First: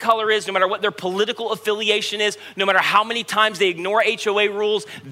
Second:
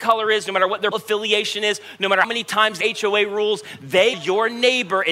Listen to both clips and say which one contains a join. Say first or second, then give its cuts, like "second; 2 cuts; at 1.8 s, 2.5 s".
second; 4 cuts; at 0.9 s, 2.2 s, 2.8 s, 4.1 s